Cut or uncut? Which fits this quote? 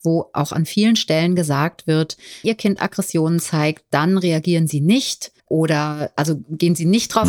cut